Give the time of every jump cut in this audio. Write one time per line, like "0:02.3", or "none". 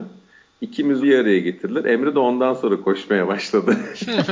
0:01.0